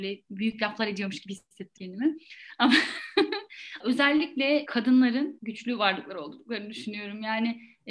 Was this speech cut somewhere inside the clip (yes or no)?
yes